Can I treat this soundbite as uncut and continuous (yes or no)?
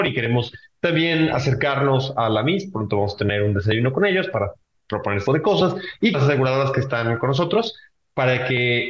no